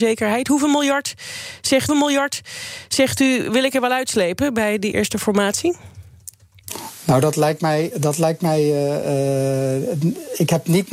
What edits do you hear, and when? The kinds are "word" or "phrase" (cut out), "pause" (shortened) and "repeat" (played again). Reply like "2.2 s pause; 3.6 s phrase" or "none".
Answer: 1.9 s repeat; 4.9 s word